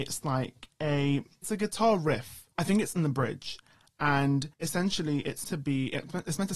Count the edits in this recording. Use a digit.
4